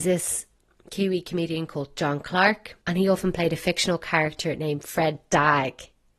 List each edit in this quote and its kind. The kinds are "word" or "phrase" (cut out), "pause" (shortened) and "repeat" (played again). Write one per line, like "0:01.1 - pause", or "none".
0:02.8 - pause